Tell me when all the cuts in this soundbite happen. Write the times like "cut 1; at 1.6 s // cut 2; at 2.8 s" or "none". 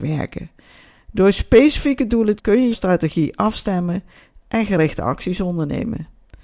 cut 1; at 2.4 s // cut 2; at 2.7 s